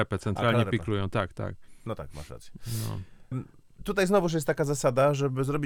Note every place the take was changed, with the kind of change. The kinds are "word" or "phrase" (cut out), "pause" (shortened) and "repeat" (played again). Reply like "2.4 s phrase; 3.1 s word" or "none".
3.3 s word; 3.8 s word